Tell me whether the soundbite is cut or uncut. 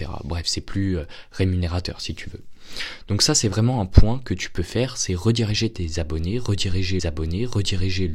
cut